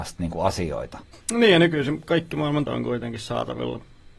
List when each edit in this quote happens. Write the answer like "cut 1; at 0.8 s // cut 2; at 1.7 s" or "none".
cut 1; at 1.1 s // cut 2; at 2.7 s